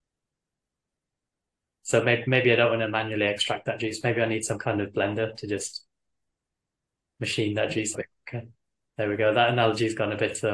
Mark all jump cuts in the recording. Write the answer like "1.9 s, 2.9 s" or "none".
7.9 s